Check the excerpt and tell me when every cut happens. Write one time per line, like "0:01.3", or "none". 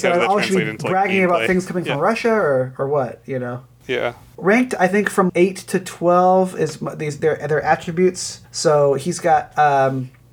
0:04.4
0:05.3
0:08.4